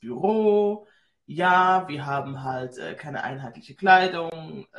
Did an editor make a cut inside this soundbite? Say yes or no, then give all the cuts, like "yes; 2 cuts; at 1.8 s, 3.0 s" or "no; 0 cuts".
no; 0 cuts